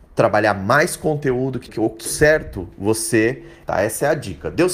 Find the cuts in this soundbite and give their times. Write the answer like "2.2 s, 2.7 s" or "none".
1.7 s, 2.1 s, 3.6 s